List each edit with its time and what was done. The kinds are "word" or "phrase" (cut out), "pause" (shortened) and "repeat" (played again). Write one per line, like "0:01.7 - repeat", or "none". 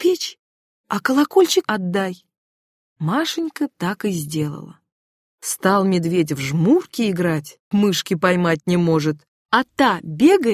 0:01.6 - word
0:07.7 - word